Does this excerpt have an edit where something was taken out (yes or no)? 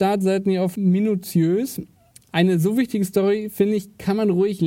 no